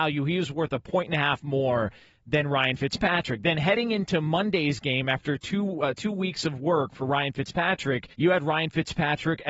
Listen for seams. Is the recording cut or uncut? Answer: cut